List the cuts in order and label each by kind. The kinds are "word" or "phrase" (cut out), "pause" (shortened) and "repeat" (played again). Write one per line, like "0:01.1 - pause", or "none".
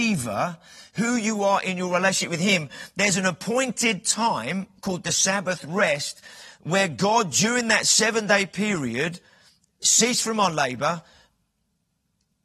none